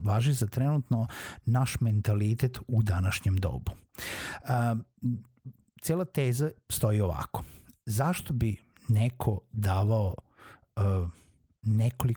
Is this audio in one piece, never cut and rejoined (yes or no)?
yes